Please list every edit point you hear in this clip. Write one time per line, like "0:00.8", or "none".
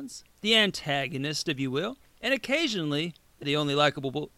0:02.0
0:03.4